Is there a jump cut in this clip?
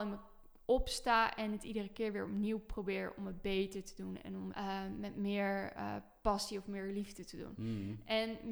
yes; 1 cut; at 4.5 s

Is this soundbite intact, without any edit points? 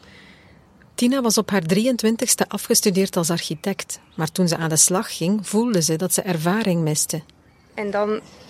yes; 0 cuts

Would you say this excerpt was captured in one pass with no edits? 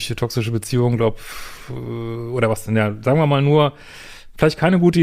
yes; 0 cuts

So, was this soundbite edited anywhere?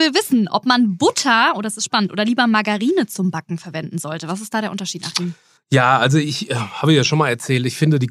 yes; 1 cut; at 5.6 s

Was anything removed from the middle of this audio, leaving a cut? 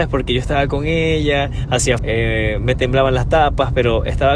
yes; 1 cut; at 2.0 s

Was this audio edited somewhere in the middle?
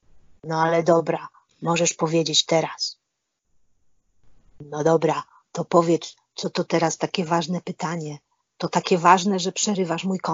no; 0 cuts

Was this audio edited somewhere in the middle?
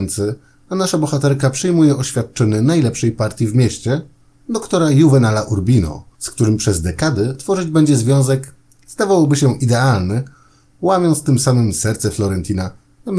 no; 0 cuts

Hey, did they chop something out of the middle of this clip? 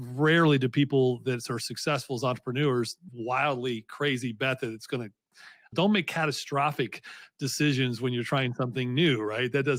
yes; 2 cuts; at 3.1 s, 5.7 s

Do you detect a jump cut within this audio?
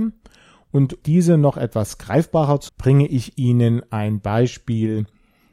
yes; 2 cuts; at 1.0 s, 2.7 s

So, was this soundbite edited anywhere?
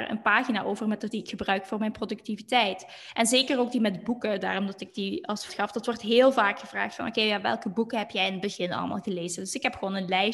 yes; 2 cuts; at 1.1 s, 5.5 s

